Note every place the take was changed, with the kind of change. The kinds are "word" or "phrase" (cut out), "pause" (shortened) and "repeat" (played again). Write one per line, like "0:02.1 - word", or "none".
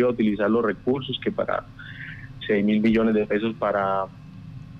0:02.4 - word